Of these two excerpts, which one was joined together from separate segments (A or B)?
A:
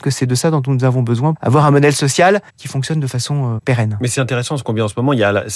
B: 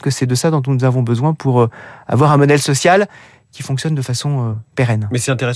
A